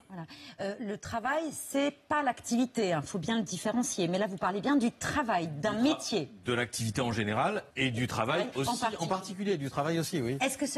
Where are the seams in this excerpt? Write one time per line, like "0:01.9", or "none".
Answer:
0:07.7